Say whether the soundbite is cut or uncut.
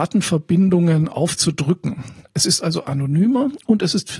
uncut